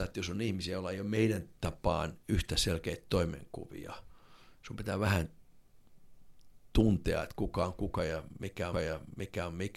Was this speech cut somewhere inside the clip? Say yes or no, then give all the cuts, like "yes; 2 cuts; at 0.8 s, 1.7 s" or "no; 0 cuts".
yes; 1 cut; at 8.7 s